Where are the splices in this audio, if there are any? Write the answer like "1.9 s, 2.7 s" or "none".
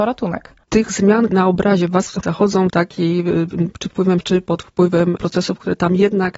1.3 s, 2.2 s, 2.7 s, 3.9 s, 4.2 s, 5.2 s